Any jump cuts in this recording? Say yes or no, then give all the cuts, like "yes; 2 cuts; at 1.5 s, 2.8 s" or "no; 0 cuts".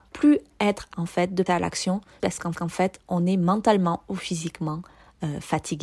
yes; 4 cuts; at 0.9 s, 1.5 s, 2.2 s, 2.5 s